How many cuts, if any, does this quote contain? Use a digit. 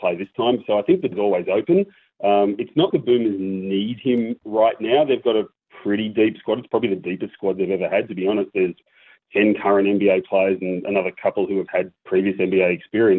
2